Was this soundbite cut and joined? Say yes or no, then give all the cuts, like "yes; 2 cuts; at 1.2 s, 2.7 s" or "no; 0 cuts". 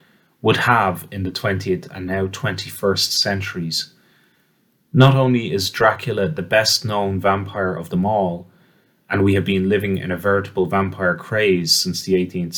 no; 0 cuts